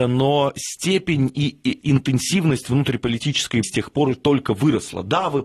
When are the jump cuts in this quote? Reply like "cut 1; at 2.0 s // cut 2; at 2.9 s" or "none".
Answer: cut 1; at 1.8 s // cut 2; at 3.6 s